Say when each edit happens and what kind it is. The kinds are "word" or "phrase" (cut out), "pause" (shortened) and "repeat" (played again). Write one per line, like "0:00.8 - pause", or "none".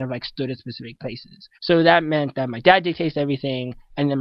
0:01.5 - pause